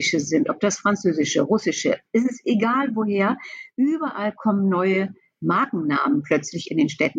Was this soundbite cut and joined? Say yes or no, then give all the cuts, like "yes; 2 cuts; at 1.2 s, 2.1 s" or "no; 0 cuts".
no; 0 cuts